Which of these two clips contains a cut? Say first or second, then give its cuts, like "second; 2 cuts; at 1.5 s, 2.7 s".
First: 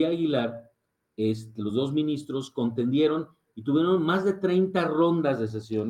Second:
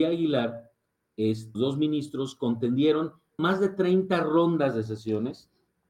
second; 2 cuts; at 1.5 s, 3.4 s